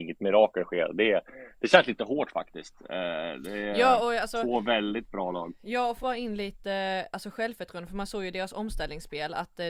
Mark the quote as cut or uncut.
cut